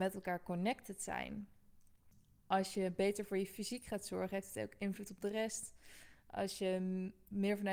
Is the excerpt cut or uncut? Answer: uncut